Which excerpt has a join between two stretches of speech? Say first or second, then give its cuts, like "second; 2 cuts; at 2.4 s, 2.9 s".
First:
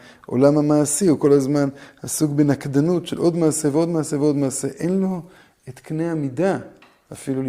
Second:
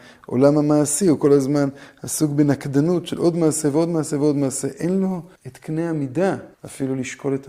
second; 2 cuts; at 5.4 s, 6.5 s